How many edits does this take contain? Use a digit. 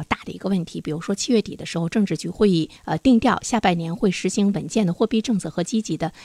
1